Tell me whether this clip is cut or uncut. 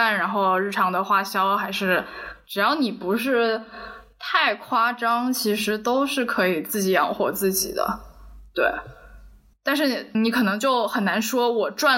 cut